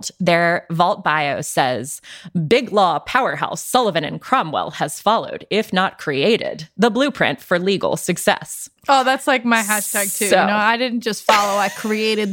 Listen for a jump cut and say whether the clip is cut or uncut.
uncut